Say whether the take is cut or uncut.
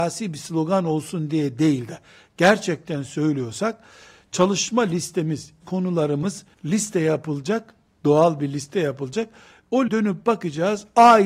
cut